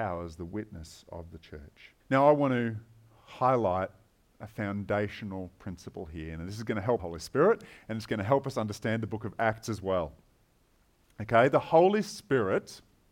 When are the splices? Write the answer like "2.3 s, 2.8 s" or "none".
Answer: 2.0 s, 7.0 s